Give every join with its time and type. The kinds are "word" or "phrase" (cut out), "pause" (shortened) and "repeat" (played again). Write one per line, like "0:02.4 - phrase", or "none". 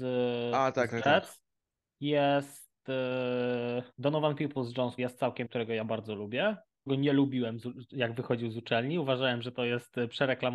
0:03.9 - pause
0:05.0 - word
0:05.4 - word
0:06.9 - phrase